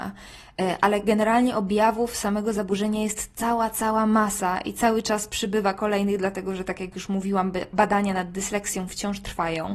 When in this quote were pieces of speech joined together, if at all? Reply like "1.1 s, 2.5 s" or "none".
none